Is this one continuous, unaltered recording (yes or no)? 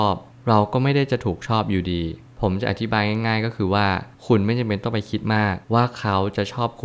no